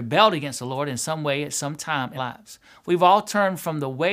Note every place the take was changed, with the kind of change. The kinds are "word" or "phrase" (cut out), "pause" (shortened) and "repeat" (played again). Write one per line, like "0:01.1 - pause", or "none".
0:02.2 - word